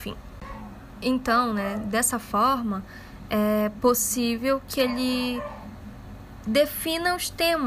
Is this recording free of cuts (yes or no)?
yes